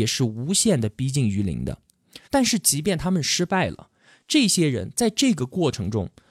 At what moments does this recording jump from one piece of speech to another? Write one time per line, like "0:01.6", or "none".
0:02.2